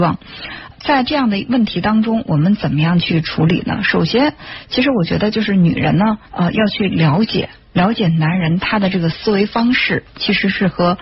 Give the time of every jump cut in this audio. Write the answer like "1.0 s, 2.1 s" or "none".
6.2 s

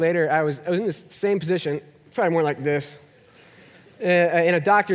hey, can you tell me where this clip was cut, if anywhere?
none

